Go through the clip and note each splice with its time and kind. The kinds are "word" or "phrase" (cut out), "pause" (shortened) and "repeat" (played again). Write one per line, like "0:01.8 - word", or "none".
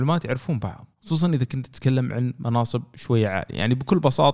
0:00.9 - pause